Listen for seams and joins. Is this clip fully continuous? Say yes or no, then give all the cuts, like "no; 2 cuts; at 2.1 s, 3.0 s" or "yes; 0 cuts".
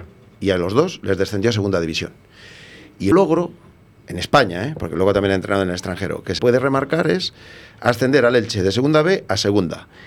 no; 2 cuts; at 3.1 s, 6.4 s